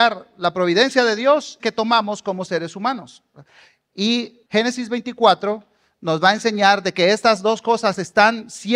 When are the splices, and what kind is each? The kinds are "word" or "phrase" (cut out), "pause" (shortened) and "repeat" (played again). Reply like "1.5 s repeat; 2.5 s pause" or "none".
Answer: 1.6 s phrase; 4.5 s pause